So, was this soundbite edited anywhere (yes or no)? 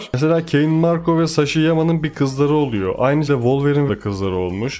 yes